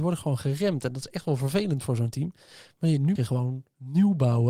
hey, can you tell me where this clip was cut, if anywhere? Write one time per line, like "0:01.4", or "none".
0:03.2